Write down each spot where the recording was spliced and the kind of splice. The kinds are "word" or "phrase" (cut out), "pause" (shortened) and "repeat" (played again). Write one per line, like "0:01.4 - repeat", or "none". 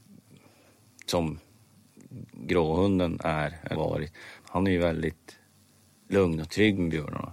0:03.8 - word
0:04.4 - word